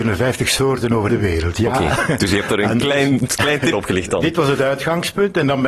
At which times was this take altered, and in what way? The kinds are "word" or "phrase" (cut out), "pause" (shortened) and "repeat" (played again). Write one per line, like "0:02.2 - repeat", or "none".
0:01.1 - word
0:02.8 - phrase
0:03.7 - phrase